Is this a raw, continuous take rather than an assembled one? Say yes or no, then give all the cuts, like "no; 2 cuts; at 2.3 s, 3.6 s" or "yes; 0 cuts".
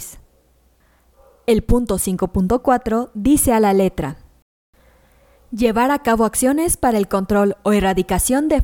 yes; 0 cuts